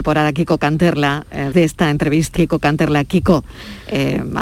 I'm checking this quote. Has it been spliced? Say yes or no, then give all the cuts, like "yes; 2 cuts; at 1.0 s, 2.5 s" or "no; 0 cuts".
yes; 2 cuts; at 1.5 s, 2.4 s